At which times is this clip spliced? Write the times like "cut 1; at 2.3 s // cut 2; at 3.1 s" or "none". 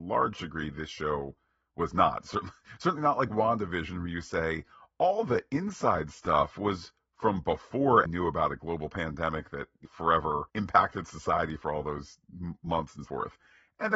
cut 1; at 8.0 s // cut 2; at 9.8 s // cut 3; at 10.5 s // cut 4; at 13.0 s